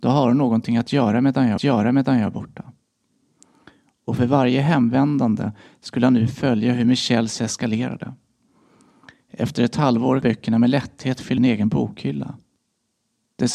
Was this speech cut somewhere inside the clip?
yes; 4 cuts; at 1.6 s, 7.4 s, 10.2 s, 11.4 s

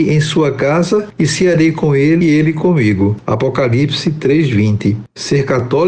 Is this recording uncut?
no; 1 cut; at 2.2 s

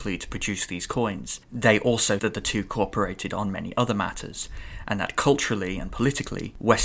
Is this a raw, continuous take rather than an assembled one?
no; 2 cuts; at 1.4 s, 2.2 s

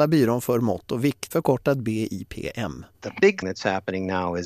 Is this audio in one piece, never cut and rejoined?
no; 3 cuts; at 1.3 s, 2.9 s, 3.4 s

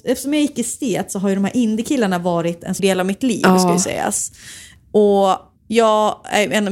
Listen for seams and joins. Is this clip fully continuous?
no; 2 cuts; at 2.8 s, 5.6 s

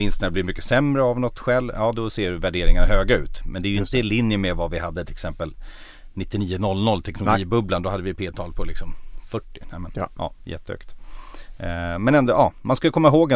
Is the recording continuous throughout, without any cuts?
yes; 0 cuts

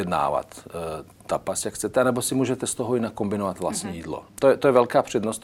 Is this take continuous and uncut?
no; 1 cut; at 4.3 s

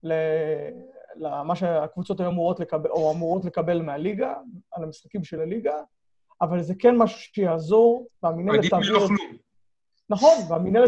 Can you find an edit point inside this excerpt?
no; 0 cuts

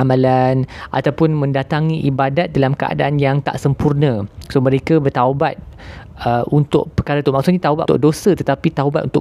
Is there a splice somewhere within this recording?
yes; 1 cut; at 7.9 s

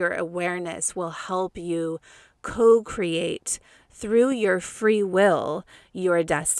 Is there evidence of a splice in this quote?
no; 0 cuts

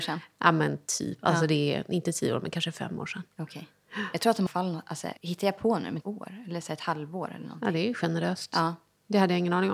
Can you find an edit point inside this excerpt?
yes; 3 cuts; at 4.5 s, 5.2 s, 6.0 s

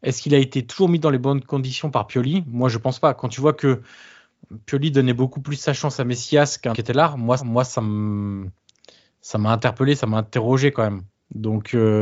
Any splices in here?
yes; 2 cuts; at 6.7 s, 7.4 s

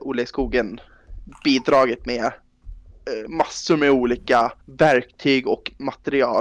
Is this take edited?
yes; 1 cut; at 4.6 s

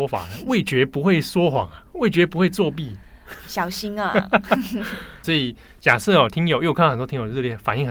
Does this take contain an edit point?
yes; 1 cut; at 5.2 s

